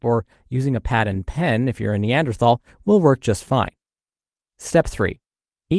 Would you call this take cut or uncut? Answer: uncut